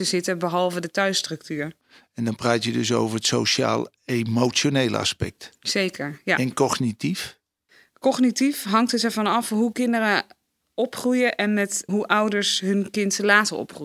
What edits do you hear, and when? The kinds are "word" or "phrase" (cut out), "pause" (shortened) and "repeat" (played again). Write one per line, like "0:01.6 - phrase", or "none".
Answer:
0:11.9 - word